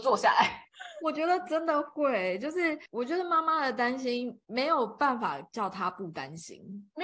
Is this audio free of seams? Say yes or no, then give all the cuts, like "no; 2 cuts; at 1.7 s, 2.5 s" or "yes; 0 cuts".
no; 1 cut; at 2.9 s